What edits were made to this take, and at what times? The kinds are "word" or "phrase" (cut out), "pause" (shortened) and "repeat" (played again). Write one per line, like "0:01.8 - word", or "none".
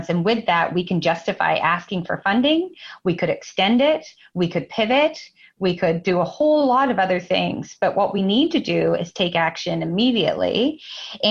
none